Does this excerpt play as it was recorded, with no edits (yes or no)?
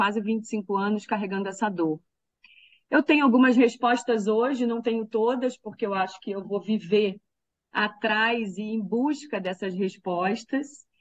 yes